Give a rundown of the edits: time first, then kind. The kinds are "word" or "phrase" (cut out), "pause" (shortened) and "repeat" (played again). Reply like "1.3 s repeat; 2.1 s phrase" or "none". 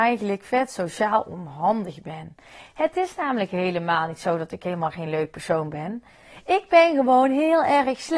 none